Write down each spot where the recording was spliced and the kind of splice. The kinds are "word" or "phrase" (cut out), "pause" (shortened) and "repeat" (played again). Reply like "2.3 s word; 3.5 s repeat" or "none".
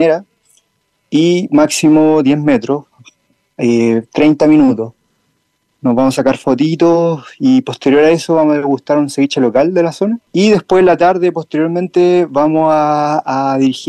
10.3 s pause

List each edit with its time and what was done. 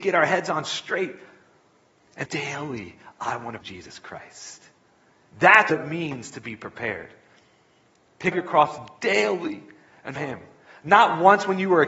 2.2 s word; 3.6 s word; 5.7 s word; 8.3 s word; 10.2 s word

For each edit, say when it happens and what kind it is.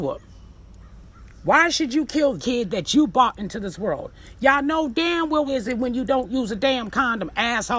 2.4 s word; 5.5 s phrase

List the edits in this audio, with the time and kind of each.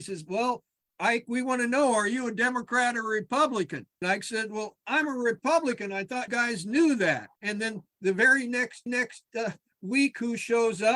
4.0 s word; 6.3 s word; 7.3 s pause; 8.9 s repeat

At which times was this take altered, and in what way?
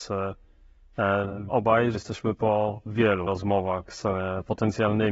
1.5 s word; 1.9 s word; 3.3 s word

